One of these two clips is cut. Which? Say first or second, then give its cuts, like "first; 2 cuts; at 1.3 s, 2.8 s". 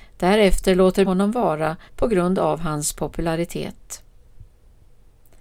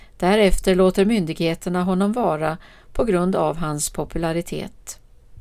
first; 2 cuts; at 1.0 s, 1.9 s